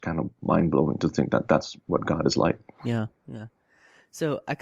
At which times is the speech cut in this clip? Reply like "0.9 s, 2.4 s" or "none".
3.2 s

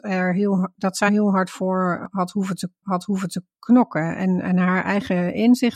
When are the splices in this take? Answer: 1.1 s, 2.8 s

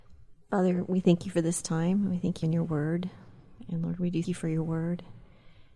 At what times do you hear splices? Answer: 2.4 s, 4.2 s

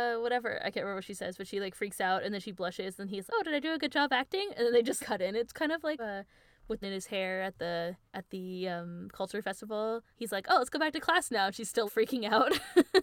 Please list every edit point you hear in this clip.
3.3 s, 5.0 s, 6.0 s, 6.8 s, 8.1 s, 10.1 s, 11.9 s

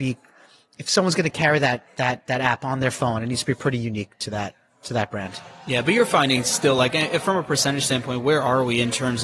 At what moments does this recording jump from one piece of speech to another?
none

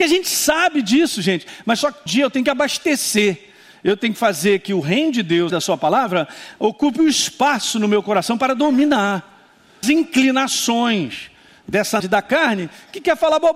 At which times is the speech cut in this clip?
2.1 s, 5.5 s, 9.8 s, 12.0 s

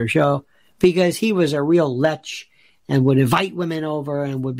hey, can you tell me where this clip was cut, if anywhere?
none

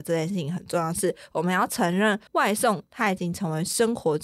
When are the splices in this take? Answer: 2.3 s

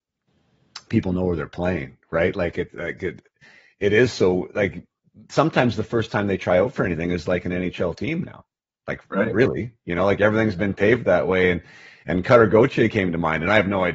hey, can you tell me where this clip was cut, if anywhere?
none

